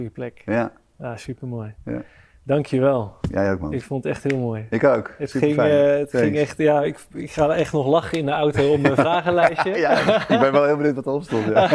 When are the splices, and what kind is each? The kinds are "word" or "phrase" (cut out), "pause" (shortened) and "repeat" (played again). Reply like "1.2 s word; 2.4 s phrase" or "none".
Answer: none